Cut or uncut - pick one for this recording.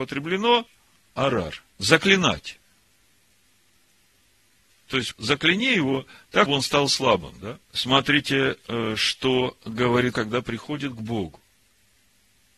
cut